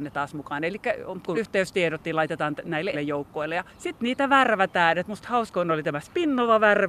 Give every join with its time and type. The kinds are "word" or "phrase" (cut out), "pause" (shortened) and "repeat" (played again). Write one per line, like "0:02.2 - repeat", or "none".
0:01.3 - word
0:02.9 - word
0:03.7 - pause